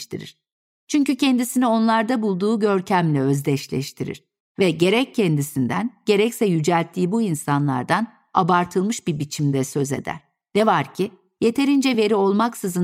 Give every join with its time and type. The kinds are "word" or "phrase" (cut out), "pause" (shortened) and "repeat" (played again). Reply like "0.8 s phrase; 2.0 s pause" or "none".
none